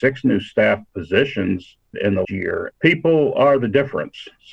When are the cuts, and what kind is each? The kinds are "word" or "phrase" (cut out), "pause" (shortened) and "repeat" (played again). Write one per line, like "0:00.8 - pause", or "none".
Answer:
0:01.9 - word
0:02.2 - word
0:02.7 - word